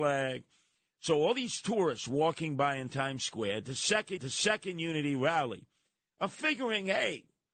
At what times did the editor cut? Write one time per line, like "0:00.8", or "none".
0:04.2